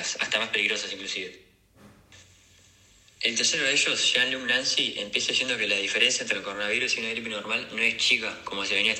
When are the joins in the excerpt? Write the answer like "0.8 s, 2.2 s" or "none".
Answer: none